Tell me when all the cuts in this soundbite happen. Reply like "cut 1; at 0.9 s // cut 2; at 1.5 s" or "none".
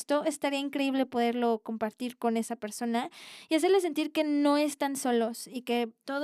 none